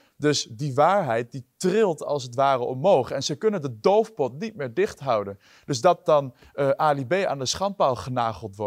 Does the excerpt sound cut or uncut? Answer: uncut